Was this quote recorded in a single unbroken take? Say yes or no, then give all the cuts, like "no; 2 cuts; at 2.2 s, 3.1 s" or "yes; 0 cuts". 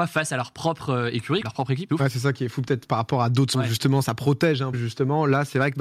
no; 5 cuts; at 1.4 s, 1.9 s, 3.5 s, 4.0 s, 4.7 s